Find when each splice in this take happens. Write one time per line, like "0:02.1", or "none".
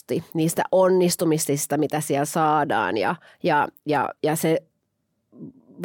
0:03.3